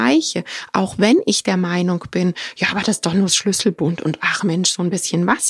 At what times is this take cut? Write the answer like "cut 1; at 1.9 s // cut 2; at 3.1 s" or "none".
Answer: none

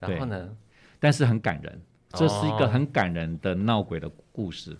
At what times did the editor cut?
cut 1; at 2.0 s

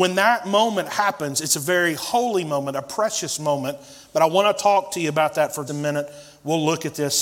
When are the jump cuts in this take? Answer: cut 1; at 5.7 s

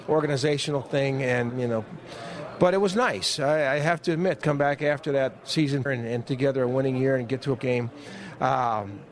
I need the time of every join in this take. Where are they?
cut 1; at 1.5 s // cut 2; at 4.4 s // cut 3; at 5.9 s // cut 4; at 6.3 s // cut 5; at 7.6 s

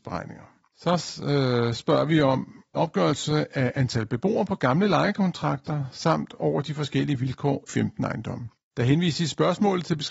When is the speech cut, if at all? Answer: cut 1; at 2.7 s // cut 2; at 7.7 s

